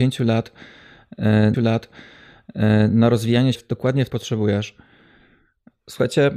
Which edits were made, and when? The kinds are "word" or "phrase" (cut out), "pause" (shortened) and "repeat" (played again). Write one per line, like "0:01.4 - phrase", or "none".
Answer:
0:01.5 - repeat
0:03.5 - word
0:04.1 - phrase